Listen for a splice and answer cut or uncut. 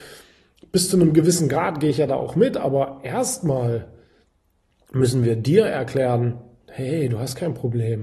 uncut